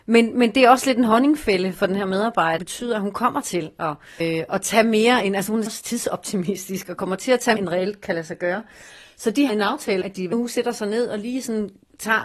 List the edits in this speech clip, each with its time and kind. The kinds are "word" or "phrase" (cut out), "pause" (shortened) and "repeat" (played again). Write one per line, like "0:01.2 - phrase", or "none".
0:02.6 - word
0:04.2 - word
0:05.7 - word
0:07.6 - word
0:09.5 - word
0:10.0 - word
0:10.3 - word

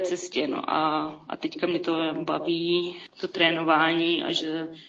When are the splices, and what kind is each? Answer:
none

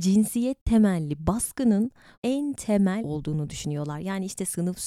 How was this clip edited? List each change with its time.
0:02.1 - word
0:03.0 - word

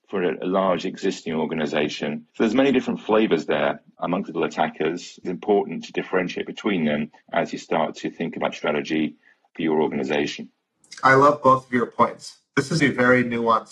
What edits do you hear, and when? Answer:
0:02.3 - pause
0:04.3 - word
0:05.2 - phrase
0:07.2 - pause
0:08.5 - phrase
0:12.8 - word

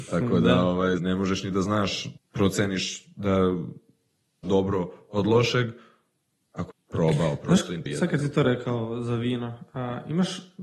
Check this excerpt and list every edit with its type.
0:01.0 - word
0:02.2 - word
0:04.4 - word
0:06.7 - word
0:07.9 - word

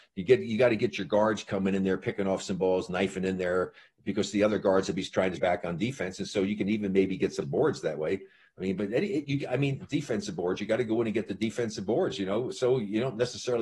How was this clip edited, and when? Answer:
0:05.4 - word
0:07.4 - word

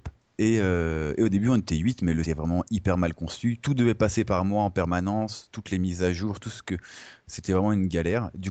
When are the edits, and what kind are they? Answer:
0:02.3 - phrase

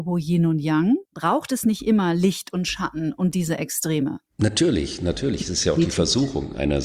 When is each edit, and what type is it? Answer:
0:01.0 - pause
0:04.3 - pause

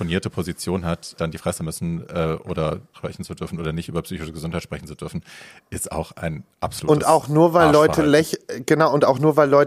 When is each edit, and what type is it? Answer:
0:01.2 - word
0:01.6 - phrase
0:02.9 - phrase
0:06.5 - pause

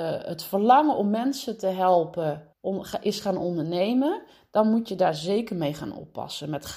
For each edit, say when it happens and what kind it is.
0:02.5 - pause

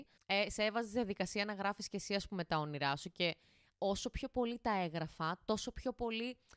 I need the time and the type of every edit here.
none

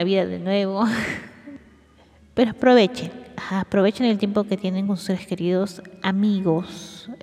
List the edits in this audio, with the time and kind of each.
none

